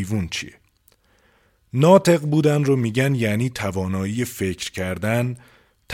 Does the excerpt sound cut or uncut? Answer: uncut